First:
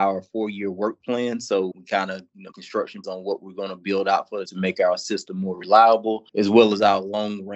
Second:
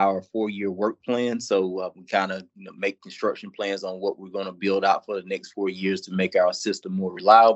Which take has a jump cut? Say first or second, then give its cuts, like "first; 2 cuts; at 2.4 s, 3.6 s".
first; 5 cuts; at 1.7 s, 2.5 s, 3.0 s, 4.5 s, 6.3 s